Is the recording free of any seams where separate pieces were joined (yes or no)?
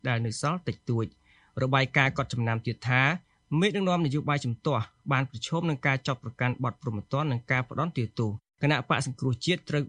yes